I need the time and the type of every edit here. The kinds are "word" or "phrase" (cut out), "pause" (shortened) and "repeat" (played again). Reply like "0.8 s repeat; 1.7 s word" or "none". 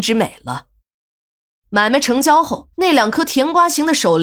2.7 s pause

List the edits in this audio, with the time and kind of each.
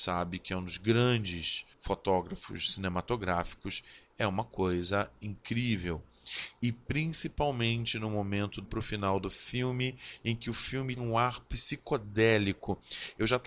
1.7 s pause; 8.6 s word; 11.0 s word

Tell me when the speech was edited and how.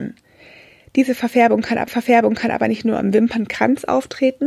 1.9 s repeat

